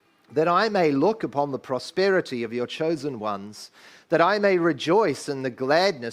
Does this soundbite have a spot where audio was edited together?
no; 0 cuts

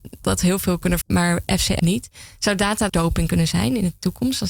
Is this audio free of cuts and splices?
no; 3 cuts; at 1.0 s, 1.8 s, 2.9 s

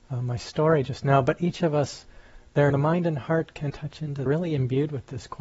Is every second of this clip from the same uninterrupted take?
no; 3 cuts; at 2.7 s, 3.7 s, 4.3 s

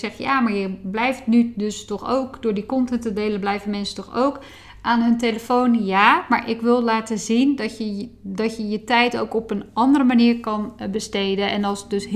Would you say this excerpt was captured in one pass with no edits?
yes; 0 cuts

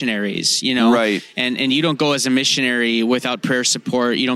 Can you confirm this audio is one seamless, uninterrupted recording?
yes; 0 cuts

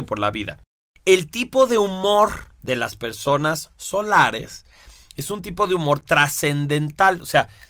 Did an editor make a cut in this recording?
yes; 1 cut; at 2.5 s

